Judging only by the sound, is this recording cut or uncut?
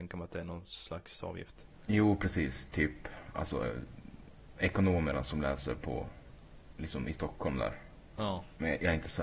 uncut